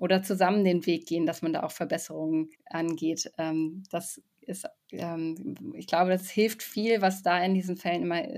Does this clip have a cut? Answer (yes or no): yes